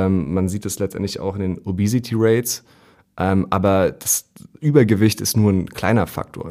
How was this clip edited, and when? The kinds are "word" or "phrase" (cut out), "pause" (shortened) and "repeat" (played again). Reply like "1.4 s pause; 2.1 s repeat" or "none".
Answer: none